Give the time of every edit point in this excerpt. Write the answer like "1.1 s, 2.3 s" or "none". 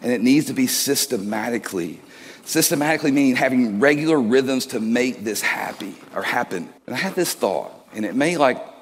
6.8 s, 7.8 s

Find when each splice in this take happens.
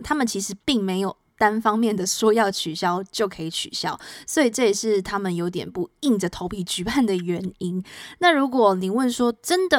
none

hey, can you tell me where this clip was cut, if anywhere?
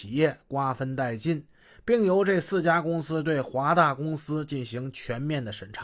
none

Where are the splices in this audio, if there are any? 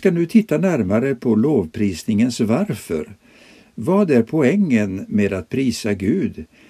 none

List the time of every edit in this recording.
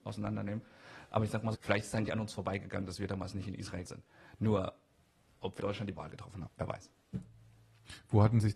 1.5 s, 2.1 s, 3.8 s, 5.6 s, 5.9 s, 6.5 s

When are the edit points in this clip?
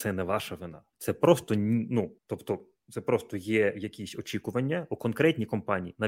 0.9 s, 2.2 s

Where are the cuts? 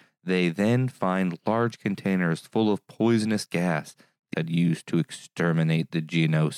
4.3 s

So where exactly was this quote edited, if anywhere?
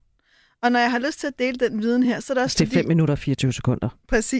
none

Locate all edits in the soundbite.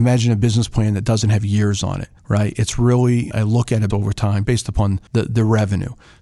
2.2 s, 3.3 s, 3.9 s, 4.4 s, 5.1 s

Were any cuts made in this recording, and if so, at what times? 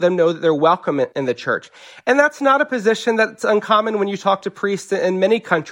none

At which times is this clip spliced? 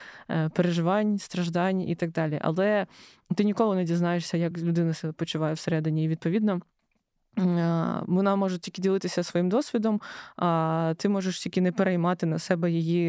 none

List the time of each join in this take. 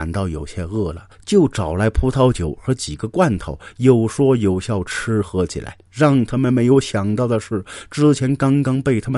5.9 s

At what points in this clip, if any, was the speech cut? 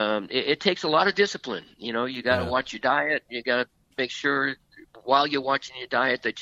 none

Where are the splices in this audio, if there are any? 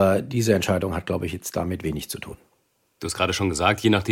none

